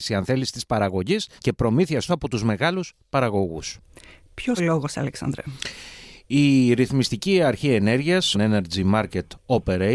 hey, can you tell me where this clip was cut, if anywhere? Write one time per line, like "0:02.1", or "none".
0:01.4
0:02.1
0:04.6
0:08.3